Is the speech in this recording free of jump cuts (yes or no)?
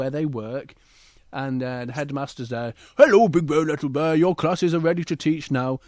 yes